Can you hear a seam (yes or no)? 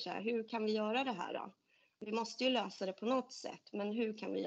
no